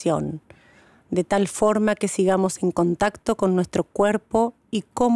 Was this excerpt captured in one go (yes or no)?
yes